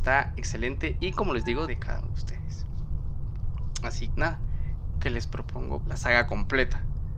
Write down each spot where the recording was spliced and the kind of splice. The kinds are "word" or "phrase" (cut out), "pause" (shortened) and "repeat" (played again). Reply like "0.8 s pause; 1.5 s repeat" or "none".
1.7 s word; 2.0 s word; 4.1 s word; 5.8 s phrase